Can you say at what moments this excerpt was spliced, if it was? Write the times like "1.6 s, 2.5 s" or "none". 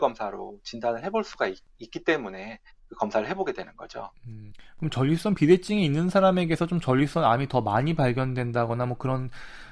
none

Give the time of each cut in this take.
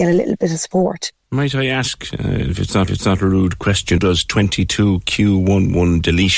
2.9 s, 4.0 s

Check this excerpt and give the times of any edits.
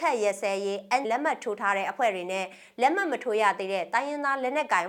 1.0 s

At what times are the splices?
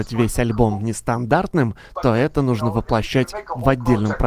none

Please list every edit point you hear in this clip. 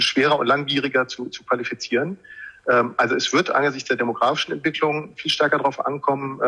none

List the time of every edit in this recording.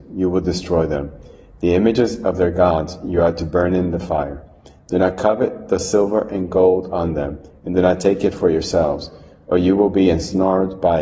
none

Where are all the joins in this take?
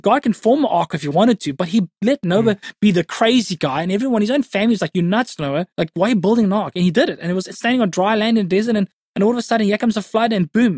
5.7 s

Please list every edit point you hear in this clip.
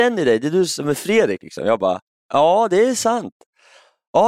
none

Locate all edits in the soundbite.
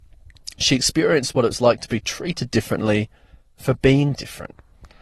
none

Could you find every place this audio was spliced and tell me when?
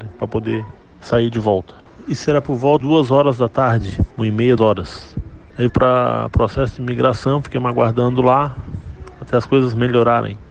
2.8 s, 4.1 s, 4.6 s, 5.7 s

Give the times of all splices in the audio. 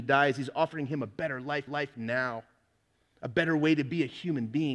1.7 s

